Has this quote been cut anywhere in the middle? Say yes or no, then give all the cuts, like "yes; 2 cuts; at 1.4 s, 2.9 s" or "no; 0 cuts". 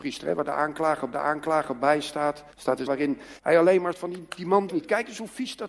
yes; 6 cuts; at 1.1 s, 2.5 s, 2.9 s, 3.4 s, 3.9 s, 4.7 s